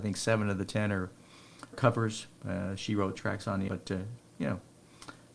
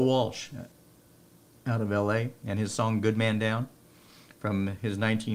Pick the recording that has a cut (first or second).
first